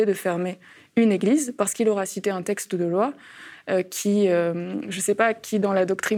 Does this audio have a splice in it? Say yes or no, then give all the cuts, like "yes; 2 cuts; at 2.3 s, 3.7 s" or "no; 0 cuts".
no; 0 cuts